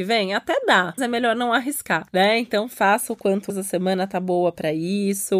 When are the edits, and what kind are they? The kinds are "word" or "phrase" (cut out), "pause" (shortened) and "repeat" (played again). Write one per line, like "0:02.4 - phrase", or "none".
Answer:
0:01.0 - word
0:03.5 - word